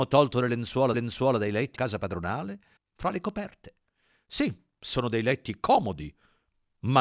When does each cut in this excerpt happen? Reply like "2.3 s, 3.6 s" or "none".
0.9 s, 1.8 s, 2.8 s